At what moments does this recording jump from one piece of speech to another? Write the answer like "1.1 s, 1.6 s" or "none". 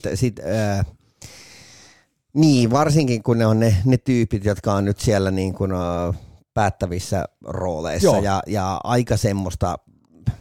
none

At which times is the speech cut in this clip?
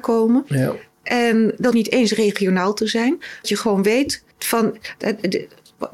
1.7 s, 3.4 s, 4.3 s

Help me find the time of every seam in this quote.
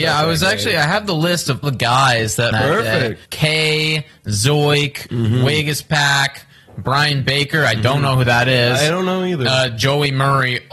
1.6 s, 2.5 s, 3.2 s

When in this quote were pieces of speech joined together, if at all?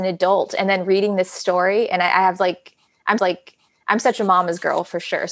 3.2 s

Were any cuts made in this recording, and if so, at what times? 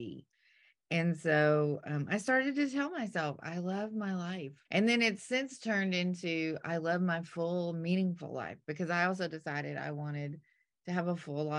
4.7 s

